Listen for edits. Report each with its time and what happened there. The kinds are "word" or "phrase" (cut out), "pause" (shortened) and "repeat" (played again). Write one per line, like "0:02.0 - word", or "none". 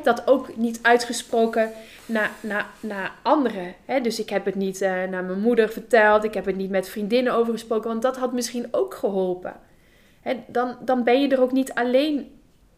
none